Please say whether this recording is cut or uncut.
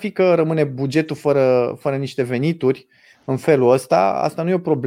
uncut